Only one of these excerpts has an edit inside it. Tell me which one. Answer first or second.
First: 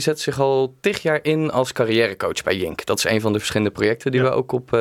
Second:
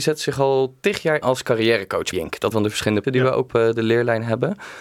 second